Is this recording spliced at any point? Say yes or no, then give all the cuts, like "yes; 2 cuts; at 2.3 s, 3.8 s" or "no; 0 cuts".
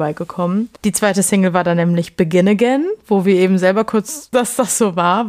yes; 1 cut; at 4.3 s